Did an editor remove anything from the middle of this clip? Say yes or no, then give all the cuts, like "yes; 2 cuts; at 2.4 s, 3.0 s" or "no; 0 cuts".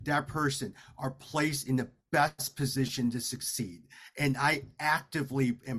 no; 0 cuts